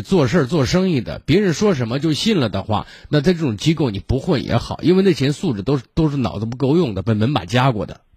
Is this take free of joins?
yes; 0 cuts

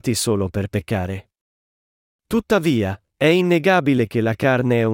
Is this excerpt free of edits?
yes; 0 cuts

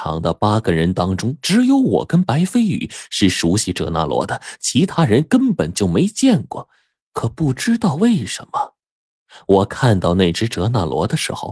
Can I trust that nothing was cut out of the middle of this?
yes; 0 cuts

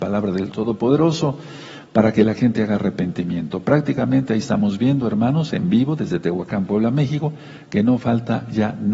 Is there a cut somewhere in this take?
no; 0 cuts

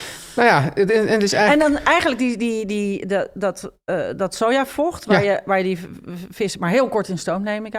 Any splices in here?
no; 0 cuts

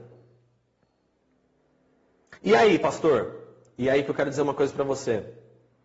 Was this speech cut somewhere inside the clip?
yes; 1 cut; at 2.4 s

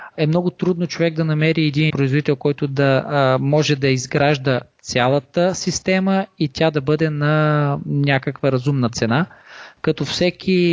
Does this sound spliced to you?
yes; 1 cut; at 1.9 s

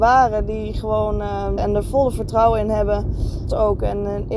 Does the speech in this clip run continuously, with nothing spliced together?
no; 2 cuts; at 1.6 s, 3.5 s

